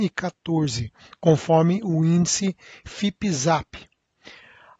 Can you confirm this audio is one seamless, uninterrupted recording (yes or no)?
yes